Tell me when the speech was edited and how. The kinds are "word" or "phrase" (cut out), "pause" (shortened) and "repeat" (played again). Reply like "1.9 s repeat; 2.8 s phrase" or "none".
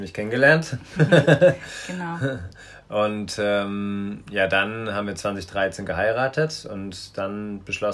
none